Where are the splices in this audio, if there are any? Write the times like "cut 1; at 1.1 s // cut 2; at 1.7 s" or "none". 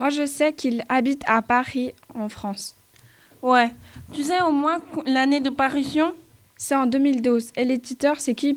none